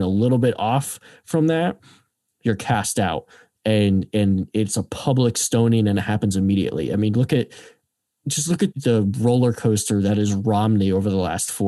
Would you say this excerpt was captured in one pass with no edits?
no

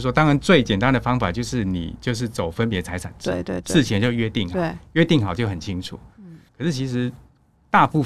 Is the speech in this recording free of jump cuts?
no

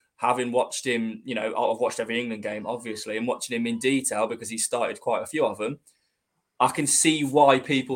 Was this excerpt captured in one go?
yes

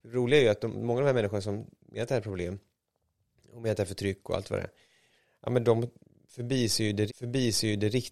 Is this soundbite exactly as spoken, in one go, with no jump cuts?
no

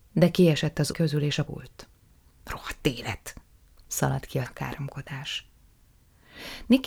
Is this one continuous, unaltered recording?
no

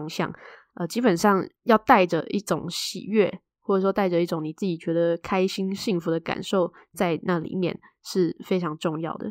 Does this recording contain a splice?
yes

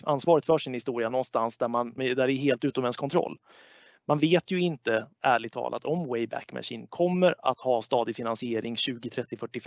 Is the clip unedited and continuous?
no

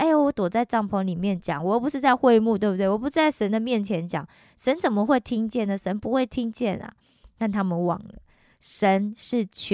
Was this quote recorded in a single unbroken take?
yes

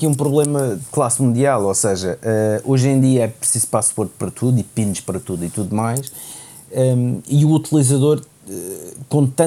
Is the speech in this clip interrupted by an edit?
no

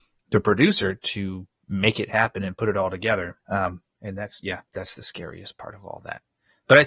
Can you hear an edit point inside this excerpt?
yes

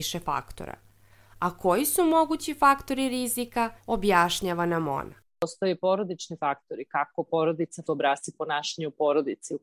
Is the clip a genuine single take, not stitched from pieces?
no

